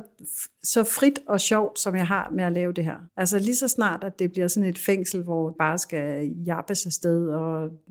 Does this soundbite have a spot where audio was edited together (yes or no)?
yes